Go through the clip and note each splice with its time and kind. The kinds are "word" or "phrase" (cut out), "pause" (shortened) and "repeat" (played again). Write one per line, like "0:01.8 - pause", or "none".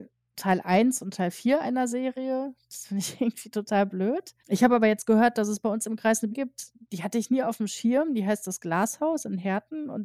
0:04.4 - pause
0:06.3 - word